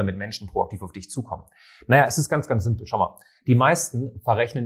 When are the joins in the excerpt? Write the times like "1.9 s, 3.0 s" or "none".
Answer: none